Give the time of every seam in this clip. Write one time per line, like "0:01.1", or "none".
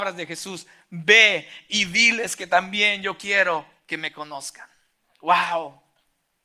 none